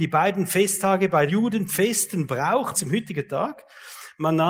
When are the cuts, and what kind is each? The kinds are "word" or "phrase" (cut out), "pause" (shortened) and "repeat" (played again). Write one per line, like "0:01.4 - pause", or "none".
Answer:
0:01.3 - word
0:01.7 - word
0:02.7 - word